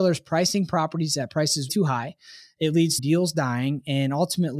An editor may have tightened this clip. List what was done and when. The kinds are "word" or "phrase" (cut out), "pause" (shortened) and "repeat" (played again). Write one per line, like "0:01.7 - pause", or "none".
0:01.7 - word
0:03.0 - word